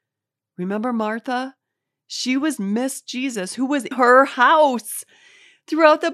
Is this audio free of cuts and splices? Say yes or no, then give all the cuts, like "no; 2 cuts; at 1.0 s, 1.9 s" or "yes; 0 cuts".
no; 2 cuts; at 2.6 s, 3.9 s